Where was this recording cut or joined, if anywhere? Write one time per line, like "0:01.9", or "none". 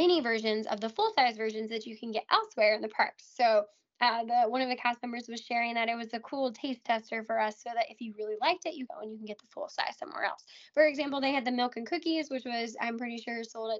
0:08.9